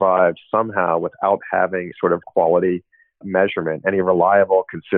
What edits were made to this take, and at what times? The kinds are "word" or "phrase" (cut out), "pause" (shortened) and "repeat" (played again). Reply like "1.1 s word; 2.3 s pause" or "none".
1.9 s word; 2.2 s word; 3.2 s word